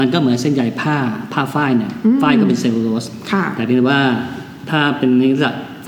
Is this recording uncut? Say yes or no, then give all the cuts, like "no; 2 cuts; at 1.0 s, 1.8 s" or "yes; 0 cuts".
yes; 0 cuts